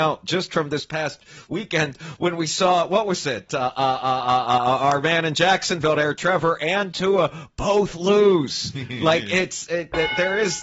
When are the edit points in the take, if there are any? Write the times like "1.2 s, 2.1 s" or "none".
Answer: none